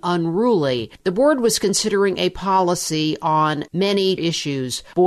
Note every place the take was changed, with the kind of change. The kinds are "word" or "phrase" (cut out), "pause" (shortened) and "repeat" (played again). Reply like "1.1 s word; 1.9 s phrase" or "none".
4.2 s word